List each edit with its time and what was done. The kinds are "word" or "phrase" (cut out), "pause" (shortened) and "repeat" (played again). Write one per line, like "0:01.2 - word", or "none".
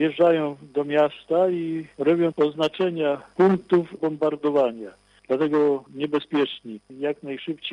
0:04.0 - word
0:05.9 - word